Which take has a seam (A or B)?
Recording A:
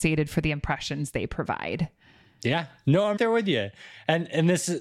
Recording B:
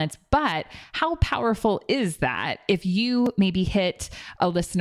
A